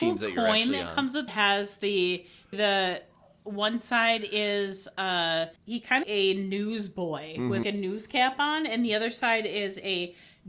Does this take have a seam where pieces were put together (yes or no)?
yes